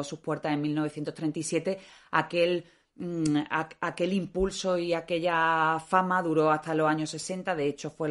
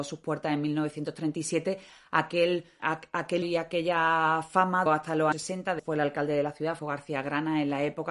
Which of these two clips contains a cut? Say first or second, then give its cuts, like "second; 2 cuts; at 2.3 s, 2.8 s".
second; 6 cuts; at 2.8 s, 3.4 s, 4.9 s, 5.3 s, 5.8 s, 6.8 s